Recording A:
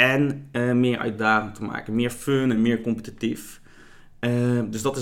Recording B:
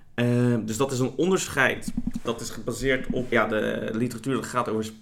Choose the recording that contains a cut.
B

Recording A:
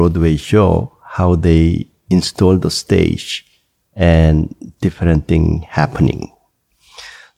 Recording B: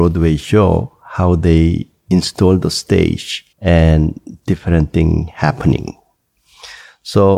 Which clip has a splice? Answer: B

